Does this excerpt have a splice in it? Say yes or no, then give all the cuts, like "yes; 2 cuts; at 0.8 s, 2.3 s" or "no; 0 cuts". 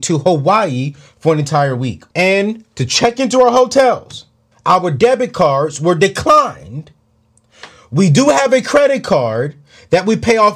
yes; 2 cuts; at 2.1 s, 4.5 s